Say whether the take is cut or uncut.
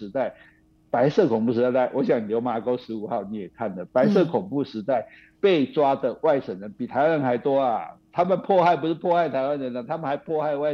uncut